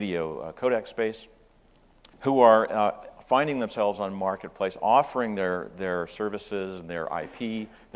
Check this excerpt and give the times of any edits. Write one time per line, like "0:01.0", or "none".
0:02.1